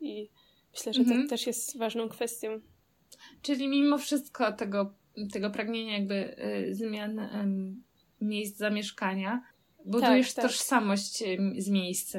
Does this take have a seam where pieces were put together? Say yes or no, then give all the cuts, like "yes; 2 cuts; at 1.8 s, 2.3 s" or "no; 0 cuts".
yes; 1 cut; at 9.5 s